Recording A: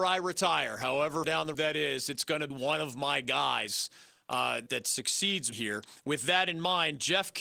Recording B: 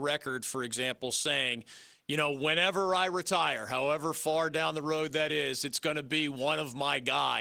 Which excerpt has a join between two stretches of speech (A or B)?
A